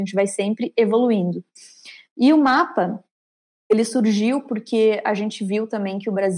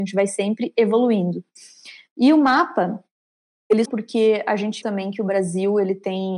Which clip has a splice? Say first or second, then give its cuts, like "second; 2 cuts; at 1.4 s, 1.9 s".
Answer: second; 2 cuts; at 3.8 s, 4.8 s